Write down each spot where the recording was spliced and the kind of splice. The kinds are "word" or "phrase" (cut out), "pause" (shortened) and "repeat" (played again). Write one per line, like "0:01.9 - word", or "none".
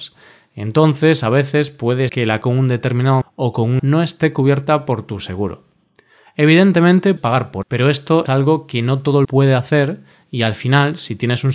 0:02.1 - word
0:02.4 - word
0:03.2 - word
0:03.8 - word
0:07.2 - word
0:07.6 - word
0:08.3 - word
0:09.2 - word